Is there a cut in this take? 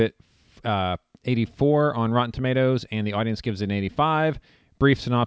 no; 0 cuts

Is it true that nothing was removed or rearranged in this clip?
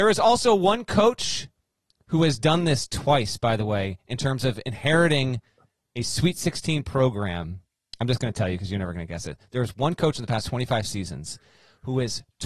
yes; 0 cuts

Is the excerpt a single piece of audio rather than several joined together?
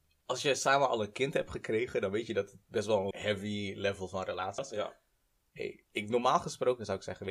no; 3 cuts; at 3.1 s, 4.6 s, 5.9 s

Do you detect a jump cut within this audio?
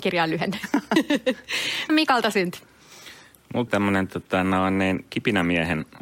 yes; 2 cuts; at 1.9 s, 3.7 s

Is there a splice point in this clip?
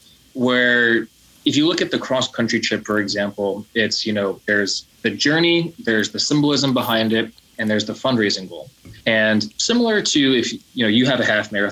yes; 2 cuts; at 4.9 s, 9.0 s

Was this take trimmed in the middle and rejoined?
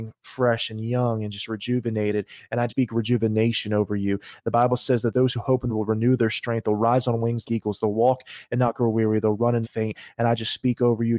yes; 4 cuts; at 2.7 s, 5.7 s, 7.4 s, 9.6 s

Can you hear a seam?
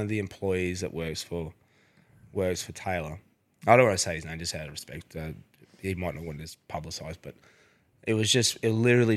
no; 0 cuts

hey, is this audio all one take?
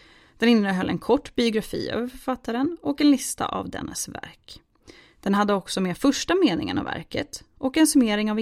yes; 0 cuts

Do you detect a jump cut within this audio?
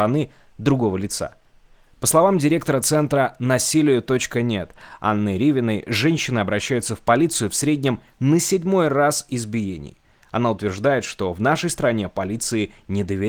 no; 0 cuts

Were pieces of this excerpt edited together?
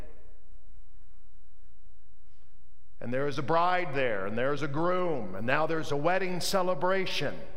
no; 0 cuts

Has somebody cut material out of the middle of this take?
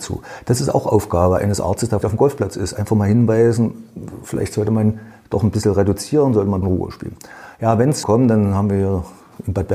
yes; 3 cuts; at 2.0 s, 6.6 s, 8.0 s

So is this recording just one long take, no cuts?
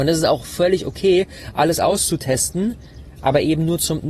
yes; 0 cuts

